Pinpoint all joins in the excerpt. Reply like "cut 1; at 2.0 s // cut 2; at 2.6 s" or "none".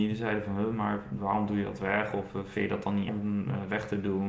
cut 1; at 3.1 s